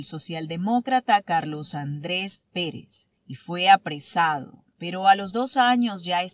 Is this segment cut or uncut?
cut